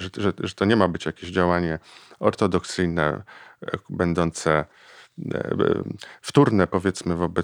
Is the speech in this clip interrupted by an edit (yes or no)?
no